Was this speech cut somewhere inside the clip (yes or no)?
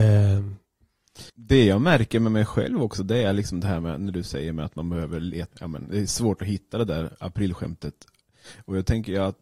yes